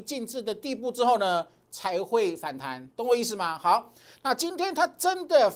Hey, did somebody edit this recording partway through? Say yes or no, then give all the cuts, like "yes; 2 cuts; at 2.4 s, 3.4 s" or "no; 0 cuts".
no; 0 cuts